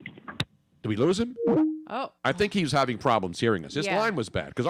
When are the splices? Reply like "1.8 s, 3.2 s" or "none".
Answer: 2.2 s